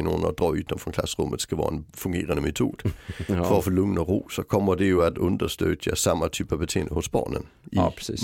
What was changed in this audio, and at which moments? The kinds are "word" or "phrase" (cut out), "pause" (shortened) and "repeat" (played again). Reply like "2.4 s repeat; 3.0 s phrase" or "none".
none